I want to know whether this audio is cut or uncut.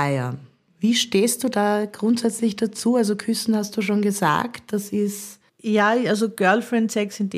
cut